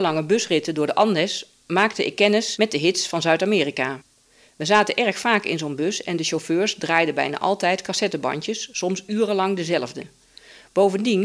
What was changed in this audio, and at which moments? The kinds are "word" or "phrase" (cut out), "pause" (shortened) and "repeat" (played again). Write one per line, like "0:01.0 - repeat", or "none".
none

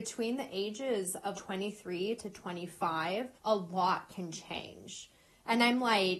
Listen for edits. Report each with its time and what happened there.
0:01.3 - word
0:03.4 - pause

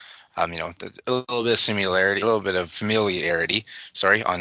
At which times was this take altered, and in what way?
0:02.2 - word

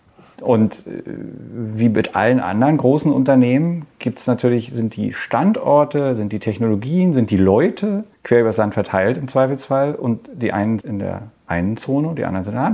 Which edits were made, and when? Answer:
0:08.1 - pause
0:10.8 - word

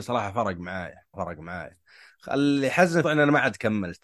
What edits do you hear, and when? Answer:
0:01.1 - word
0:03.0 - word

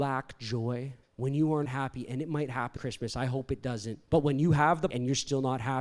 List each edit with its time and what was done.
0:01.0 - pause
0:01.6 - word
0:02.8 - word
0:04.0 - pause
0:04.9 - word

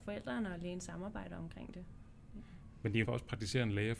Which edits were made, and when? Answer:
0:03.0 - word

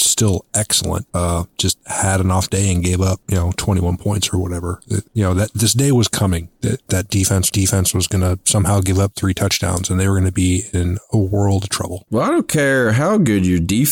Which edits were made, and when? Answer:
0:06.9 - word
0:07.5 - repeat

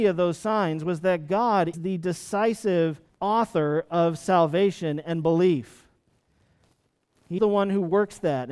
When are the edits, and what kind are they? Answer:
0:01.7 - word
0:03.1 - pause
0:07.4 - word

